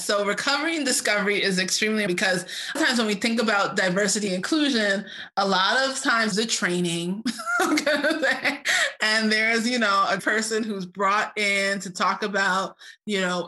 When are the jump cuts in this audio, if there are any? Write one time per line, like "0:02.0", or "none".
0:02.1
0:02.8
0:04.3
0:06.3
0:10.2